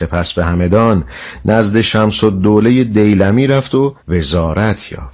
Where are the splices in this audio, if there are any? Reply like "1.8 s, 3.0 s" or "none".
4.0 s